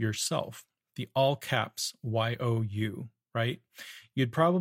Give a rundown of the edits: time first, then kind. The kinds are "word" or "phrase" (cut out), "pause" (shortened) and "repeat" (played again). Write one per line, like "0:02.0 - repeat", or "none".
none